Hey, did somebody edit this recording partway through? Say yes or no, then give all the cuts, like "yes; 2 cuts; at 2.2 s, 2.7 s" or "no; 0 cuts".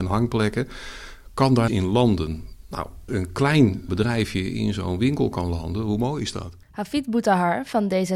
yes; 4 cuts; at 1.7 s, 3.1 s, 3.9 s, 6.6 s